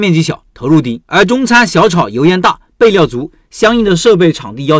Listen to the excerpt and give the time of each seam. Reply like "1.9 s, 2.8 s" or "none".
1.0 s